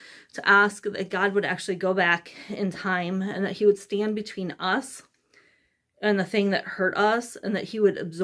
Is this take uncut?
yes; 0 cuts

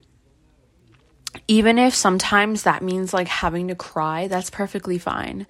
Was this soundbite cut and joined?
no; 0 cuts

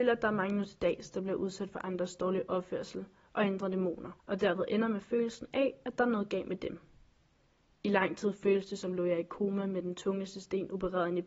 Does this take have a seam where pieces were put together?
yes; 1 cut; at 4.2 s

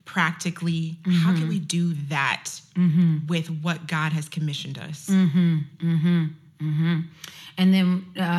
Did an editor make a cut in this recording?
no; 0 cuts

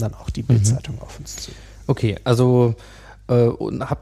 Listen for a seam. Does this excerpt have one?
no; 0 cuts

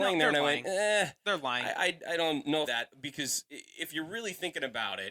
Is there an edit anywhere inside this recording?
yes; 1 cut; at 2.6 s

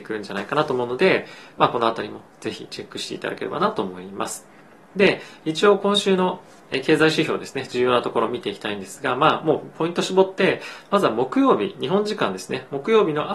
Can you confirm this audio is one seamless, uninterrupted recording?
yes; 0 cuts

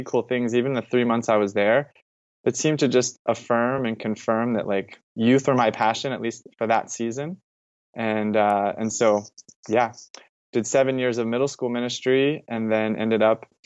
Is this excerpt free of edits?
yes; 0 cuts

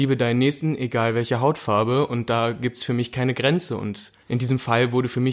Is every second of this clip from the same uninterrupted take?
no; 1 cut; at 4.2 s

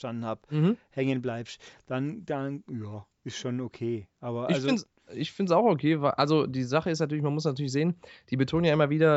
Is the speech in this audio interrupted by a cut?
no; 0 cuts

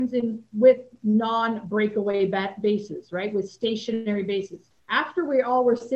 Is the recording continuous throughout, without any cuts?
no; 1 cut; at 4.8 s

